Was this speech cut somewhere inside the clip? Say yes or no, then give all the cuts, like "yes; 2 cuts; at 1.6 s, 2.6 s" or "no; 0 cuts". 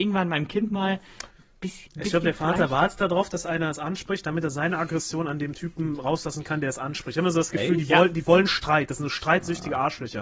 yes; 1 cut; at 1.9 s